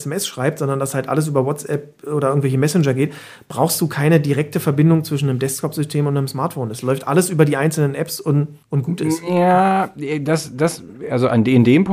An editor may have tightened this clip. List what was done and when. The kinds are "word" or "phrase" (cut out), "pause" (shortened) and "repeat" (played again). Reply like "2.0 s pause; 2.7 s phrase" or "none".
8.6 s pause